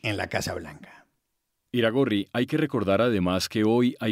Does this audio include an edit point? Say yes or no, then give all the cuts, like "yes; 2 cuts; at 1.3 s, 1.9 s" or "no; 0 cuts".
no; 0 cuts